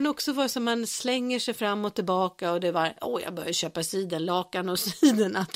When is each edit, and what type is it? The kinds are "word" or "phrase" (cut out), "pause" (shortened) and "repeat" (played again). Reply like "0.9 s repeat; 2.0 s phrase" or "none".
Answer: none